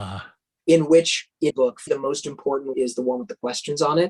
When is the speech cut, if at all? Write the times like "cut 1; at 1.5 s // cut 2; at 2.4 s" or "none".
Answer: cut 1; at 1.5 s // cut 2; at 1.9 s // cut 3; at 2.7 s